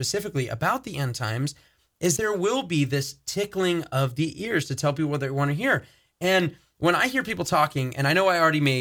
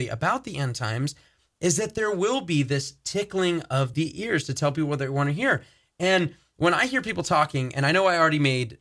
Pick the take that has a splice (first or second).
first